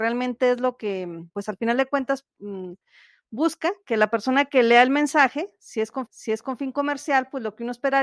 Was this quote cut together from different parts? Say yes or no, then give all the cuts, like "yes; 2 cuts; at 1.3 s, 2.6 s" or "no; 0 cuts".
yes; 2 cuts; at 1.3 s, 6.1 s